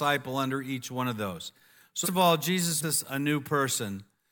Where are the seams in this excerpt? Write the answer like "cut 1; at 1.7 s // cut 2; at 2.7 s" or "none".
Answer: cut 1; at 2.0 s // cut 2; at 2.8 s